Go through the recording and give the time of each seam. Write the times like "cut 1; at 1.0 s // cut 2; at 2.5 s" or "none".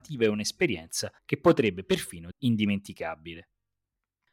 cut 1; at 1.2 s // cut 2; at 2.3 s